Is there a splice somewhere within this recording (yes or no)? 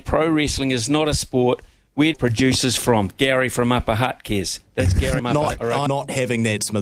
yes